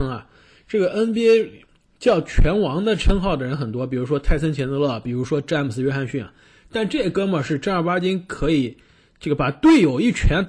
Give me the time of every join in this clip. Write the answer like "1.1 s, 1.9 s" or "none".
none